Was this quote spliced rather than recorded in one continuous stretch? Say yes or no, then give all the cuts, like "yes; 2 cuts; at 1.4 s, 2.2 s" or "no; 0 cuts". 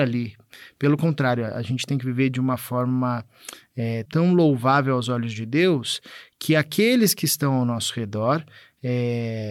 yes; 1 cut; at 4.1 s